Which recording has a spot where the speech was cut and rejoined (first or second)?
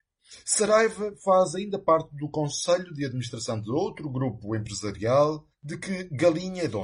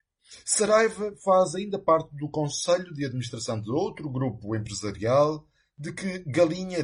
first